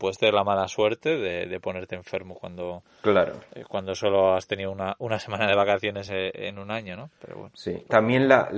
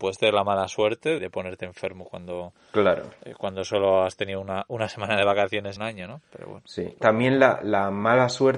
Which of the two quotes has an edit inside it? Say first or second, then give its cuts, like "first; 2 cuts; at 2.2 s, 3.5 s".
second; 2 cuts; at 1.2 s, 5.8 s